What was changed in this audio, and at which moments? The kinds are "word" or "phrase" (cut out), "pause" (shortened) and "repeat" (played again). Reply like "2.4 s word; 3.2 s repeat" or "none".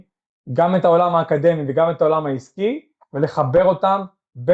none